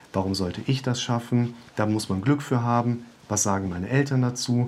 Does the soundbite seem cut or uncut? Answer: cut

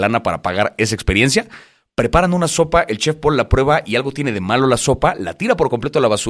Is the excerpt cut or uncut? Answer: uncut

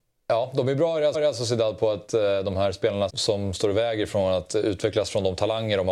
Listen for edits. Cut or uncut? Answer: cut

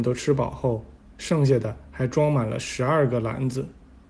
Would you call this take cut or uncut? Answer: uncut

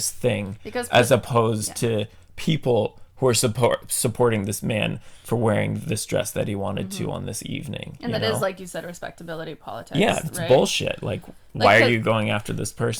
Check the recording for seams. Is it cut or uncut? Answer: uncut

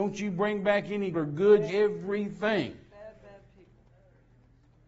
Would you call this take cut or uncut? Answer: cut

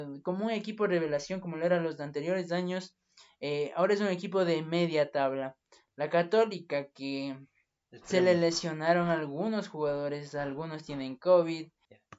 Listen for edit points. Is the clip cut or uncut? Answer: uncut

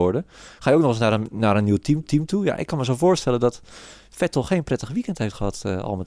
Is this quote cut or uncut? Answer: cut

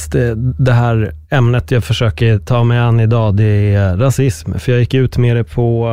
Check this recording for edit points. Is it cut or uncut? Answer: cut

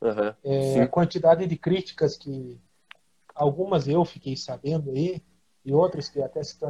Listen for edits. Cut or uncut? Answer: uncut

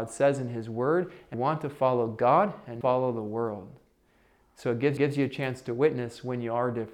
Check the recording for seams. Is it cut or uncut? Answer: cut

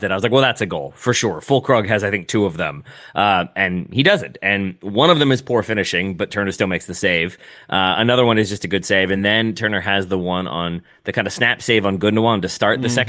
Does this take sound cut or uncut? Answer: uncut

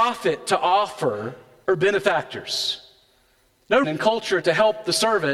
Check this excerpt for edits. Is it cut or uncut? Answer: cut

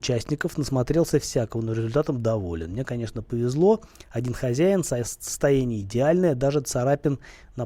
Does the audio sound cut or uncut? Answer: uncut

